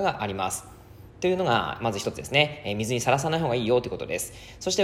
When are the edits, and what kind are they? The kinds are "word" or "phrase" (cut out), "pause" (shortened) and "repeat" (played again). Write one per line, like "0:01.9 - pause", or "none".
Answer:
0:01.1 - pause

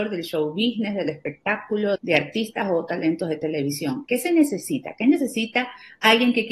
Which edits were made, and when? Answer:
0:02.0 - word

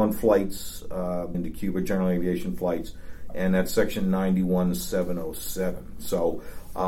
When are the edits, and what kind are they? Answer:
0:01.3 - word

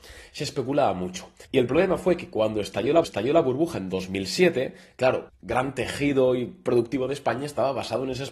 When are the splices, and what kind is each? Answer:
0:01.4 - pause
0:03.0 - repeat
0:05.3 - word

